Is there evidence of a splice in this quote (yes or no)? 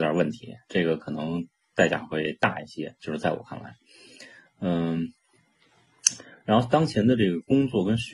no